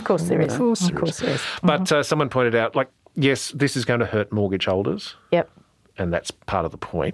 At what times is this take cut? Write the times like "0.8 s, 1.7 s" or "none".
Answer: none